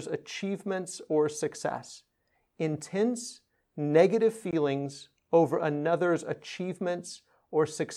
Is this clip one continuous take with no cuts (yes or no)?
yes